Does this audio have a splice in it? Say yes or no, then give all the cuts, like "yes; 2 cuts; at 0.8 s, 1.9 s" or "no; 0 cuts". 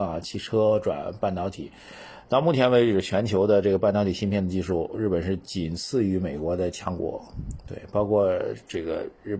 no; 0 cuts